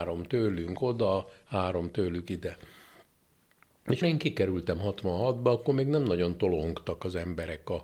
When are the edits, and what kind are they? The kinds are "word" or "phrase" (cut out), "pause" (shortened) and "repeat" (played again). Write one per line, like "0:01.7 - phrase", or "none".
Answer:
0:04.0 - word